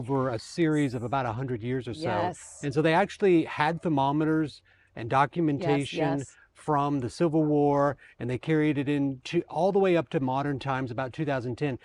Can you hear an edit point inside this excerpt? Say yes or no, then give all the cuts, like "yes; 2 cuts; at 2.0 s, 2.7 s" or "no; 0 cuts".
no; 0 cuts